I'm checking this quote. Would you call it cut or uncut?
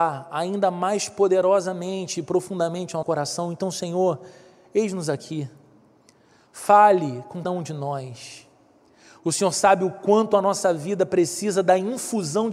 cut